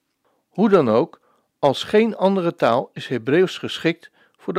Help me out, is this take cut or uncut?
uncut